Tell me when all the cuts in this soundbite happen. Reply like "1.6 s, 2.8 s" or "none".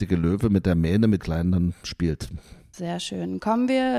1.2 s